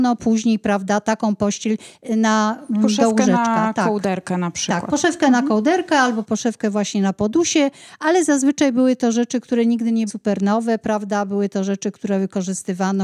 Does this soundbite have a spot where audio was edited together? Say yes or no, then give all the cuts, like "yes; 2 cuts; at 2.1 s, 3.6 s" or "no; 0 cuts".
yes; 1 cut; at 10.1 s